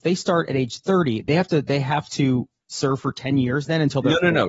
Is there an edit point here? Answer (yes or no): no